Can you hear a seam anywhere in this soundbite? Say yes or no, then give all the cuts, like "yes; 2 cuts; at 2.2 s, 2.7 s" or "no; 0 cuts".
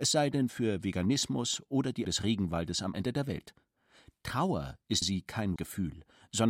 yes; 4 cuts; at 2.0 s, 2.9 s, 5.0 s, 5.6 s